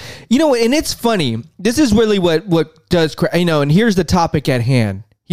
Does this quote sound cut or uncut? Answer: uncut